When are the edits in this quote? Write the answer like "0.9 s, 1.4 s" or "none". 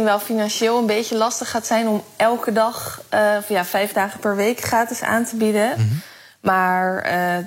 none